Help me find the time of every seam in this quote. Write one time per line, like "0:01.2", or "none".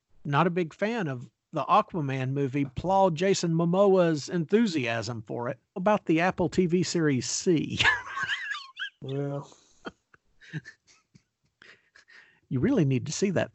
0:02.7
0:05.8